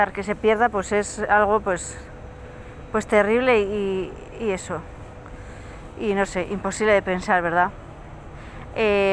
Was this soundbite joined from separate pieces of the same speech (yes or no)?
no